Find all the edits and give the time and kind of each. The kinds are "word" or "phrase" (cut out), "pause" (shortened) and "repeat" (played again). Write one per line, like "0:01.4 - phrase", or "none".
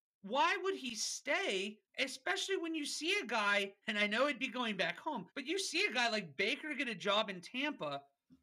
0:01.9 - pause
0:03.8 - pause
0:05.3 - pause